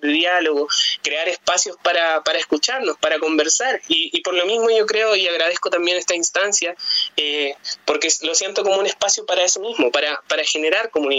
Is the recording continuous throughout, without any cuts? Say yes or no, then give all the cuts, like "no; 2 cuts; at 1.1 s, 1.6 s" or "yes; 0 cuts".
yes; 0 cuts